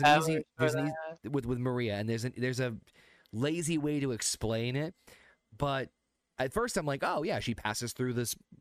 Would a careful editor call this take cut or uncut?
uncut